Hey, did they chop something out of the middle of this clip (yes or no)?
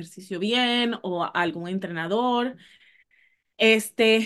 no